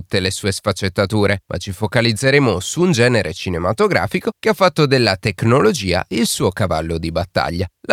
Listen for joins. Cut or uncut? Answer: uncut